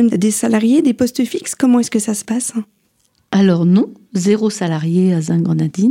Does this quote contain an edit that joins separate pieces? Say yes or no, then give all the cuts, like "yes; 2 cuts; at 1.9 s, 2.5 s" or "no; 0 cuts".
no; 0 cuts